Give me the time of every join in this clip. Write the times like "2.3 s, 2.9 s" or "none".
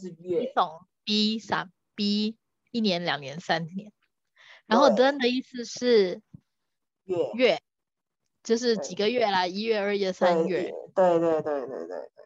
none

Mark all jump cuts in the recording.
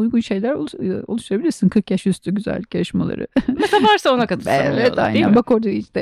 none

